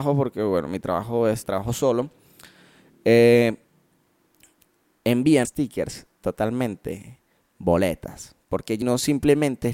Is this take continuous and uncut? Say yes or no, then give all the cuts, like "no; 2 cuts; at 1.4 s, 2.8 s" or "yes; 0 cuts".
no; 3 cuts; at 1.4 s, 5.4 s, 8.8 s